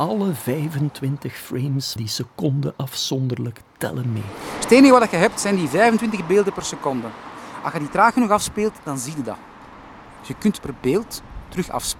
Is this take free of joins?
no; 2 cuts; at 2.0 s, 10.6 s

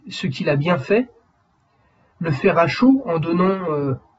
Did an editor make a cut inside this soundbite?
no; 0 cuts

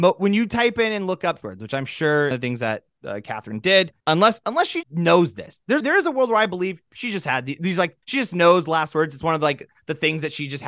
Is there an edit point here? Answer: yes; 6 cuts; at 1.4 s, 2.3 s, 4.0 s, 4.8 s, 5.8 s, 8.0 s

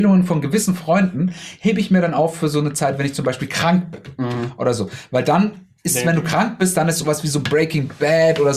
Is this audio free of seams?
yes; 0 cuts

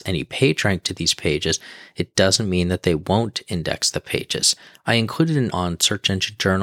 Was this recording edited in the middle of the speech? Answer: yes; 1 cut; at 5.5 s

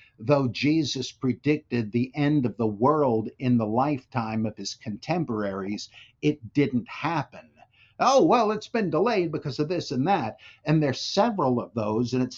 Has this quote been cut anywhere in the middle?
no; 0 cuts

